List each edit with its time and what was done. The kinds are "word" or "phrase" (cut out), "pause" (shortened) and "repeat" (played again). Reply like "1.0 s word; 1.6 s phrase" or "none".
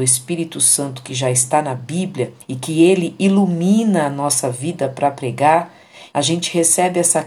2.4 s pause; 6.1 s word